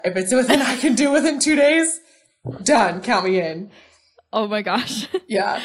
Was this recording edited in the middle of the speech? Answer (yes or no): no